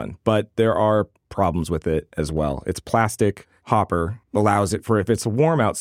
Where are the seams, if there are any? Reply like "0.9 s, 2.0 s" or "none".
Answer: 4.2 s